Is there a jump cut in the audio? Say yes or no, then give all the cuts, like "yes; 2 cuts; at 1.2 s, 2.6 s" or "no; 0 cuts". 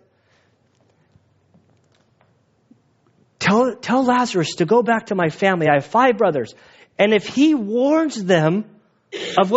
no; 0 cuts